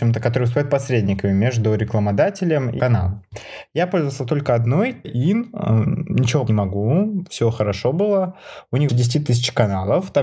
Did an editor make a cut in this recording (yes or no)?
yes